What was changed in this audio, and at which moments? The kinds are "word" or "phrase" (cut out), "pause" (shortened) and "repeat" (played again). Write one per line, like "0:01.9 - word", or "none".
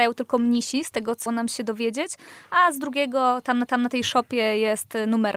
0:01.3 - word
0:03.7 - repeat